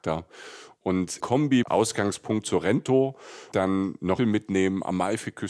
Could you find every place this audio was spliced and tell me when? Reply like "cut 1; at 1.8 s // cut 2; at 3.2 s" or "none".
cut 1; at 1.2 s // cut 2; at 1.6 s // cut 3; at 3.5 s // cut 4; at 4.2 s